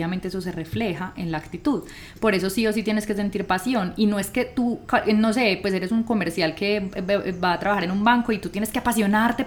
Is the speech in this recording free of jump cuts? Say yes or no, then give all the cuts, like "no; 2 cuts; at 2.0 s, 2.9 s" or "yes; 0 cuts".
yes; 0 cuts